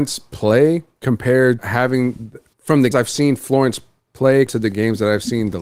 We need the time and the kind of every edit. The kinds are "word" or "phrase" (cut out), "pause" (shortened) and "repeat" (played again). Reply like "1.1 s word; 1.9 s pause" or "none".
1.6 s word; 2.9 s word; 4.5 s word

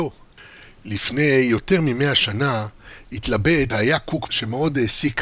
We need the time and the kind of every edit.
3.7 s word; 4.3 s word

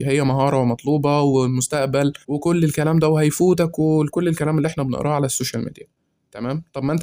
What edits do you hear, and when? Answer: 2.2 s pause

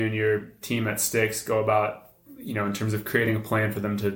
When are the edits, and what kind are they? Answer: none

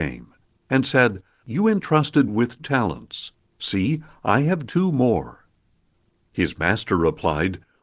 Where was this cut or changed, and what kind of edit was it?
1.4 s word; 2.3 s word; 2.6 s word; 4.7 s word

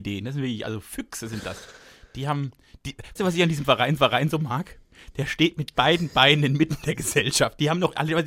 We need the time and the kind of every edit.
3.2 s word; 4.0 s repeat

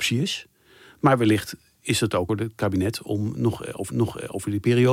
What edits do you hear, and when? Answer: 2.3 s phrase; 3.9 s repeat

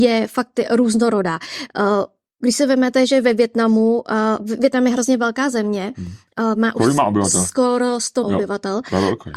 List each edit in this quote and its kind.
8.2 s word

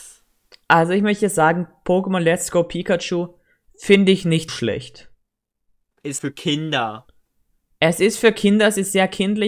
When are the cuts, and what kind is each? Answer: 4.5 s word; 6.2 s word

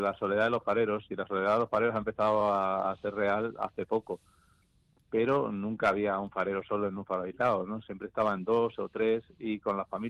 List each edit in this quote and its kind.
none

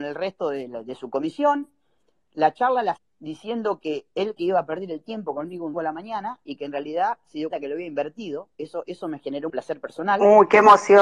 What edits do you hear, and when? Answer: 3.0 s word; 4.4 s word; 5.7 s word; 7.5 s word; 9.5 s word

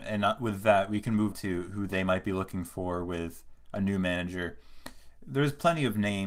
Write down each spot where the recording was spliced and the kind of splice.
1.3 s word

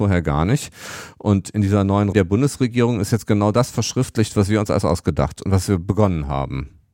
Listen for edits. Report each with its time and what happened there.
2.1 s word

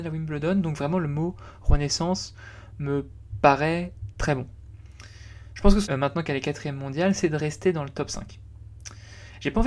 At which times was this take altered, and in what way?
5.9 s word

